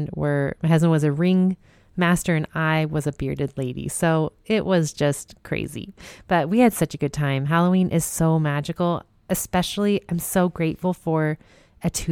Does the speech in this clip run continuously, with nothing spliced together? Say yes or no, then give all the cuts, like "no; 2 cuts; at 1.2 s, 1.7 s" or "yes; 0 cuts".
yes; 0 cuts